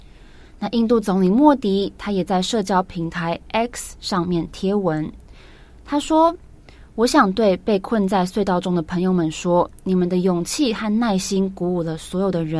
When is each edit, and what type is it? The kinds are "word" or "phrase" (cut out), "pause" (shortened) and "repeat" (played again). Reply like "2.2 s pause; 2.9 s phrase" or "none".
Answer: none